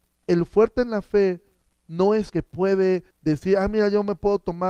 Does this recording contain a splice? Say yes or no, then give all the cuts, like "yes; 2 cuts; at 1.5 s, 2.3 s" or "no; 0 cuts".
yes; 3 cuts; at 1.7 s, 2.3 s, 3.1 s